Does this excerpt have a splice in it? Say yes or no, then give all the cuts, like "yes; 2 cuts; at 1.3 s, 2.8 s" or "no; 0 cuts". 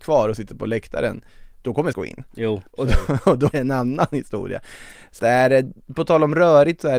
yes; 3 cuts; at 1.9 s, 3.5 s, 5.2 s